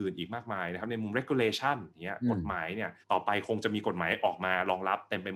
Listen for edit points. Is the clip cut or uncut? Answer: cut